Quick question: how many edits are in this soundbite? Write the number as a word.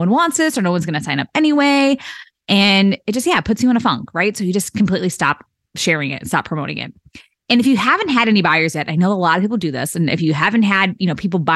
zero